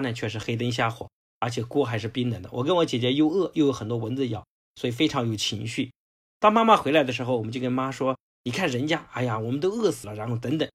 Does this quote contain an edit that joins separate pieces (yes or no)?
no